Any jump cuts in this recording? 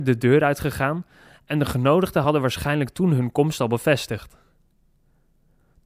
no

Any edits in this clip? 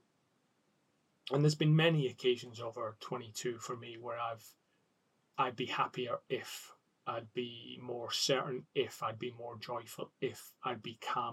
no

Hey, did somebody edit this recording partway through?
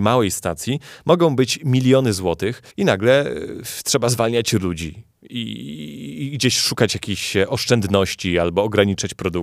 yes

